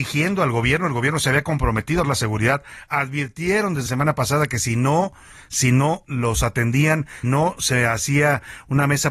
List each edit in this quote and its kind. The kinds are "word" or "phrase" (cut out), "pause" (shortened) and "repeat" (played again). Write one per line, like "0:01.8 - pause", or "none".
0:02.0 - word
0:03.9 - word
0:07.2 - word